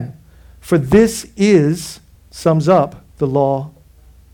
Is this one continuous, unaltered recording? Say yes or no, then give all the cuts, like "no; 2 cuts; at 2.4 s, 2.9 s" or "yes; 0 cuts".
no; 2 cuts; at 2.1 s, 3.1 s